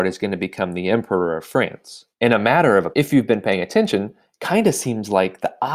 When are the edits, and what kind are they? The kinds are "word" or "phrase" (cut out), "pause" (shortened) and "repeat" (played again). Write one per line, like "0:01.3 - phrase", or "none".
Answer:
0:02.1 - pause
0:02.9 - phrase